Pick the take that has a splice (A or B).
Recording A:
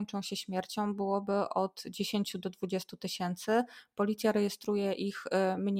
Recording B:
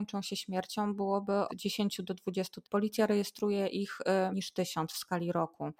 B